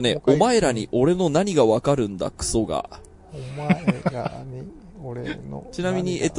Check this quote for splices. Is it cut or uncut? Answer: uncut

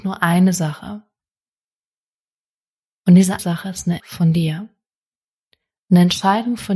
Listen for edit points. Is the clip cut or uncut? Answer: cut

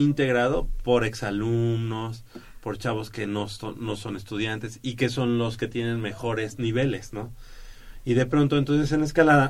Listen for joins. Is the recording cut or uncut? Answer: uncut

